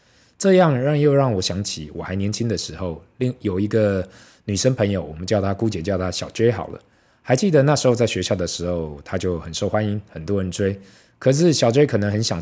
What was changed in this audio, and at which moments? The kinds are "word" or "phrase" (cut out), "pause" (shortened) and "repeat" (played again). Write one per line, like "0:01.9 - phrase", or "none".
none